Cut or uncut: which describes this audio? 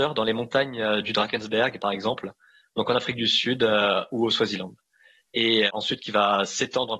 uncut